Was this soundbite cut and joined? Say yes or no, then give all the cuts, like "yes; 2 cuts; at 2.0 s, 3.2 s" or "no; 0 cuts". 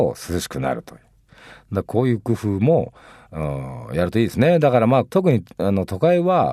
no; 0 cuts